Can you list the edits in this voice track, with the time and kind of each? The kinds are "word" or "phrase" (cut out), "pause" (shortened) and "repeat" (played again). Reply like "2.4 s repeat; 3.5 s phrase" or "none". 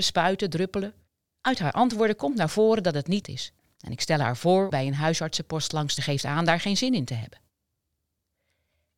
1.1 s pause; 3.2 s word; 3.6 s pause; 4.7 s word; 6.0 s phrase

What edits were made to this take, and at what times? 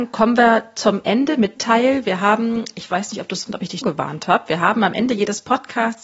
1.6 s word; 3.5 s word; 3.8 s word

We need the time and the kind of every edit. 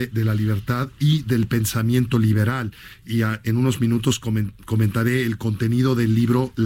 none

